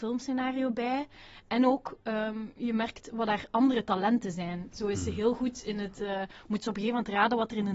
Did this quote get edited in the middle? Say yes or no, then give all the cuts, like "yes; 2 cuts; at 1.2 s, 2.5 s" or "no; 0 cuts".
no; 0 cuts